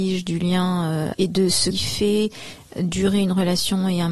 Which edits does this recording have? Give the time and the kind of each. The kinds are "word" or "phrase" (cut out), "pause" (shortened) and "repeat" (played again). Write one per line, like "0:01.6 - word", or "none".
0:01.1 - word
0:01.7 - word